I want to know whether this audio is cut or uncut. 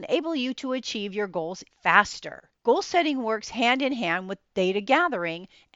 cut